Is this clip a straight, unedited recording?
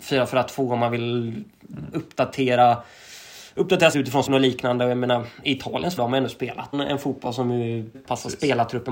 no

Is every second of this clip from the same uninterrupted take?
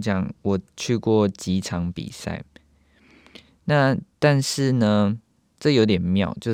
yes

